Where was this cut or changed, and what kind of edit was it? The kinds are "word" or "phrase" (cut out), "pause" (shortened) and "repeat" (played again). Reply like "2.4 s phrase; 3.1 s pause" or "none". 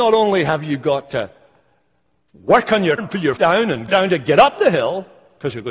3.0 s word; 3.4 s word; 3.9 s word